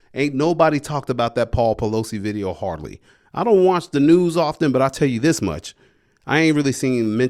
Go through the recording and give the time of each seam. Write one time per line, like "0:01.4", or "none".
none